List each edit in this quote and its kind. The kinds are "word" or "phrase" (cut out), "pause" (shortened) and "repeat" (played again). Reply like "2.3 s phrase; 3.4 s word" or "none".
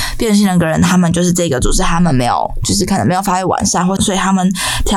4.0 s phrase